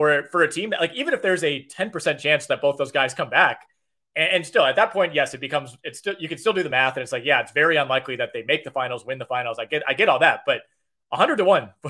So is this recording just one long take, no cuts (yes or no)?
yes